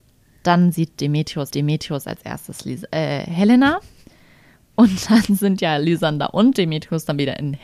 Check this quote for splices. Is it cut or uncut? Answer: cut